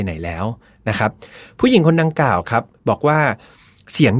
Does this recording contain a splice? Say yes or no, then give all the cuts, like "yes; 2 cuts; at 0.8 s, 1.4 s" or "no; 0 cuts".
no; 0 cuts